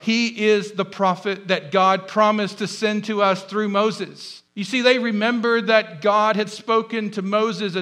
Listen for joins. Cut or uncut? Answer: cut